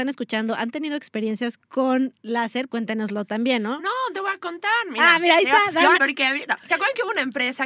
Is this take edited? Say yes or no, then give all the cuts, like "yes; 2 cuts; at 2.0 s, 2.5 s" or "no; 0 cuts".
yes; 4 cuts; at 2.7 s, 4.1 s, 5.9 s, 6.7 s